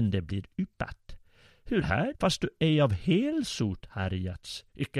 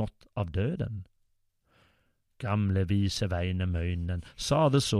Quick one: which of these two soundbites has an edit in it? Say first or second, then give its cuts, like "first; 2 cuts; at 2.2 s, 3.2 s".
first; 2 cuts; at 1.8 s, 2.1 s